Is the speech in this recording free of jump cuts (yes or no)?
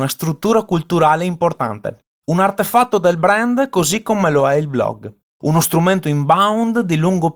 no